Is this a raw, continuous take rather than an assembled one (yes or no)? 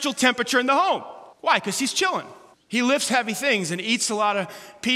no